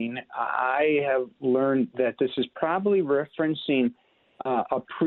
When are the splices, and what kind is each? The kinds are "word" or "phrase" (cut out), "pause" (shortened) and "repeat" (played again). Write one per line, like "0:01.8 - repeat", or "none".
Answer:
none